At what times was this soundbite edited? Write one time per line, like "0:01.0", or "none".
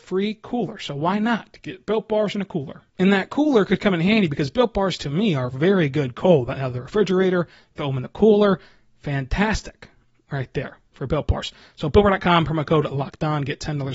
none